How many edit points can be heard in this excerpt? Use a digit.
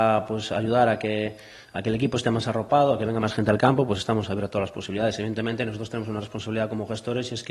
0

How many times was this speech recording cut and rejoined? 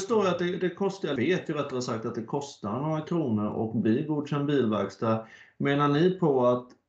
1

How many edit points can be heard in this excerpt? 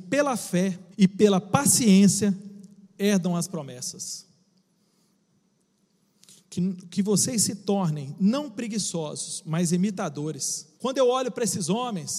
2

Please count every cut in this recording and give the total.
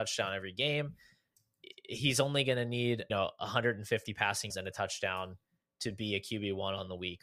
2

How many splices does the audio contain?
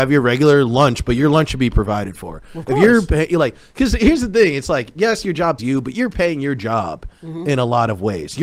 1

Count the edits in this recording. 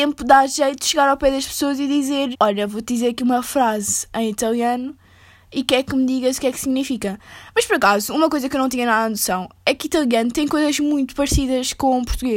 1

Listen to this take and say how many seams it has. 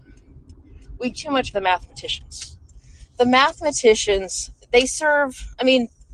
2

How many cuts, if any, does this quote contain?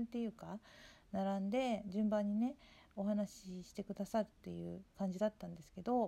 1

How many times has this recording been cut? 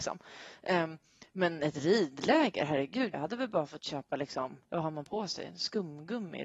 2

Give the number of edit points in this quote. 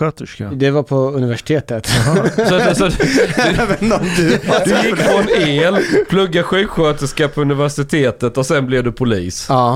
0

